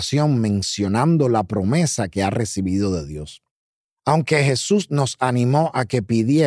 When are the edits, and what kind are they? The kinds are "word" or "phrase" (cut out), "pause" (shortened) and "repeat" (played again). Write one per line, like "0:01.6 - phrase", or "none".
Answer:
0:03.7 - pause